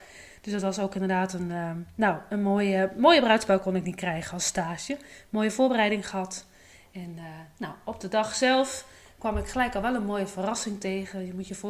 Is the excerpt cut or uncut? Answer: uncut